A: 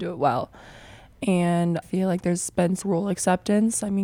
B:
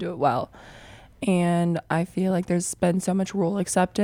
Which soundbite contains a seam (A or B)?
A